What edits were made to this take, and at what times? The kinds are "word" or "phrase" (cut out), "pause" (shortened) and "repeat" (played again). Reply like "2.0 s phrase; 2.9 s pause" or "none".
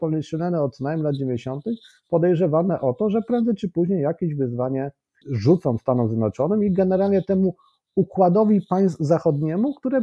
none